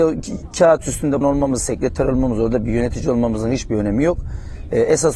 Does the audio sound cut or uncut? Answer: cut